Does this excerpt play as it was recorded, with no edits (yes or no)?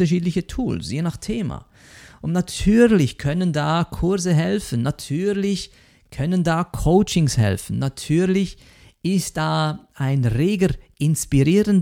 yes